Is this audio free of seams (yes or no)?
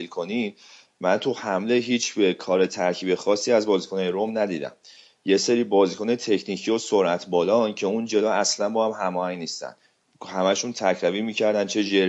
yes